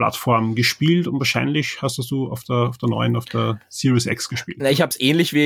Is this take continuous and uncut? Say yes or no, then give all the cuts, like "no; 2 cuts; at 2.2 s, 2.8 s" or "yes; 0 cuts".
yes; 0 cuts